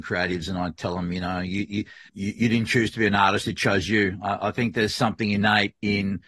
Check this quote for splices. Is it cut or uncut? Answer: cut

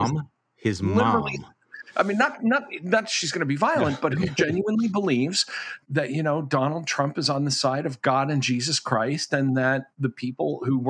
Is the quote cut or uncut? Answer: uncut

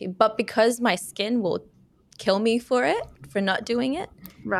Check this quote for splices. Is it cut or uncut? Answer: uncut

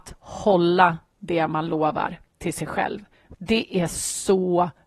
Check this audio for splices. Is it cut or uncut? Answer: uncut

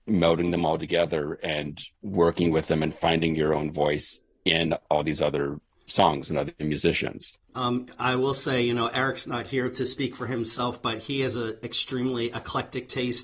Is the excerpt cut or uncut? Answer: cut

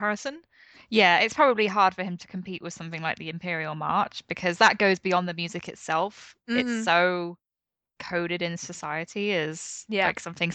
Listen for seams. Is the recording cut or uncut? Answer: uncut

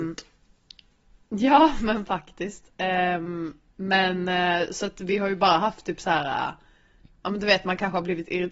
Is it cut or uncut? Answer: uncut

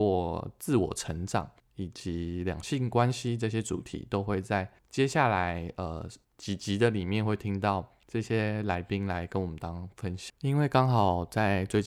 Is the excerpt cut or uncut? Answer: cut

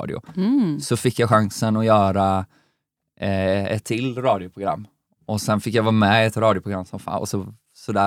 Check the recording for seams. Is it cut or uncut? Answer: uncut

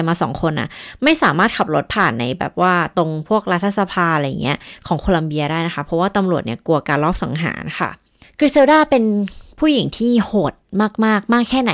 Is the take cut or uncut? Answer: cut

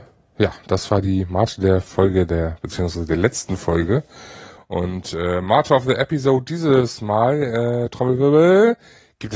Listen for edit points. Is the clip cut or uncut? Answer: uncut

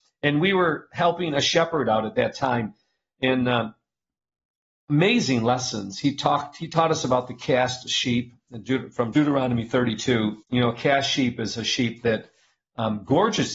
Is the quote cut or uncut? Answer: cut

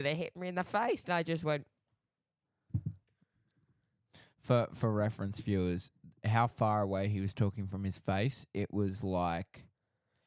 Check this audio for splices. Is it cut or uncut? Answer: uncut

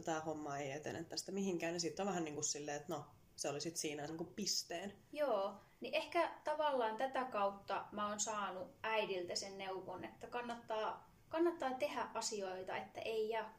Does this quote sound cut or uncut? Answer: cut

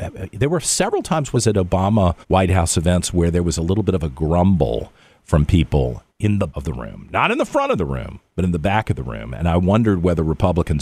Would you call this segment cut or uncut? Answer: cut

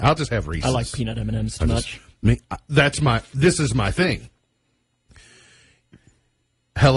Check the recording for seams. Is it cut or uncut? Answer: cut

